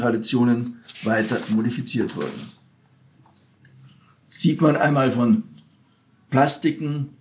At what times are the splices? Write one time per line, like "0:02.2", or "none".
none

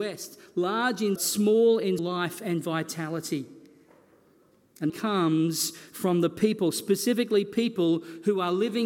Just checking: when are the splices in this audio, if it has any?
0:01.2
0:02.0
0:04.9

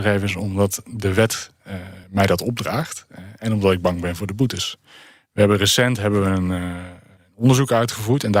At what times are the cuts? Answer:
0:02.0

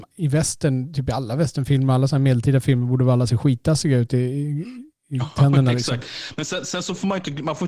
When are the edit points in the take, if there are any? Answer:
none

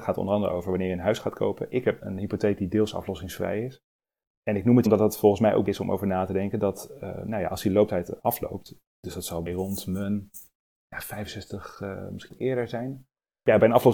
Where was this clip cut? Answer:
0:02.0
0:04.9
0:05.7
0:08.9
0:09.5
0:12.3

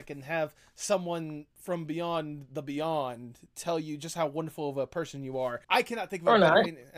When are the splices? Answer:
0:01.5
0:05.6

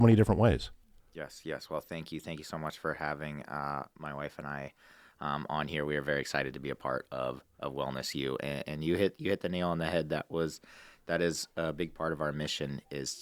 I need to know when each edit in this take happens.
none

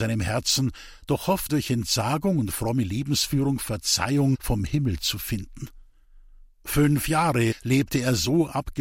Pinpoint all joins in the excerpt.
0:01.5

